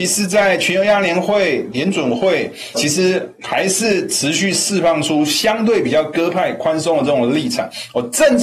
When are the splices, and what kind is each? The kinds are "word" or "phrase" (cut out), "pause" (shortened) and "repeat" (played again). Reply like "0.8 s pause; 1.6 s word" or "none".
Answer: 2.7 s phrase